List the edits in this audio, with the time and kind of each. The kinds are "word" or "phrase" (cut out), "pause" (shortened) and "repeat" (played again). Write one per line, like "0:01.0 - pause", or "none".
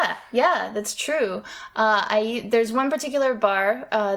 none